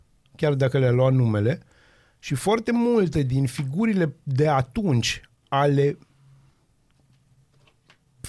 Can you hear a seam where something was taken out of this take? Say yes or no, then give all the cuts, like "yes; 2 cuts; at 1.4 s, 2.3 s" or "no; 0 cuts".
no; 0 cuts